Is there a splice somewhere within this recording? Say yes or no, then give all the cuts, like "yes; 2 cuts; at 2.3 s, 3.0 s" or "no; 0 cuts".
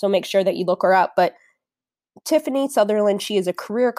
no; 0 cuts